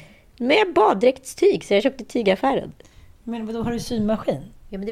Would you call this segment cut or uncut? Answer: uncut